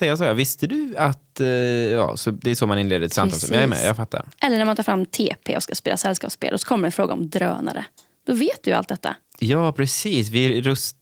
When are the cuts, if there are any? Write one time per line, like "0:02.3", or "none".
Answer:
none